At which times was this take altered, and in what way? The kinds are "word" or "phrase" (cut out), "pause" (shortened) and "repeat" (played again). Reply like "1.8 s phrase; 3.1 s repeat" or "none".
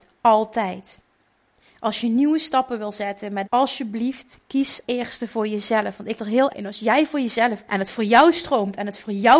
3.4 s phrase; 4.8 s word; 6.2 s word; 6.5 s word; 7.7 s word